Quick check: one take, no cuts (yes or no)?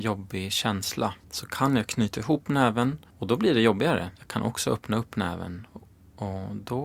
no